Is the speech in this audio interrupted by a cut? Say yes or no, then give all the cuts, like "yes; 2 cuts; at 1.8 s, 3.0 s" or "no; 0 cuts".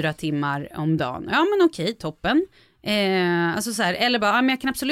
no; 0 cuts